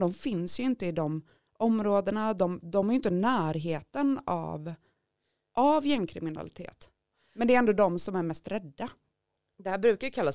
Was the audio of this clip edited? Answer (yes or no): no